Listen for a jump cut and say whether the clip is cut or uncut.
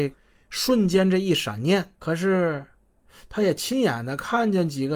cut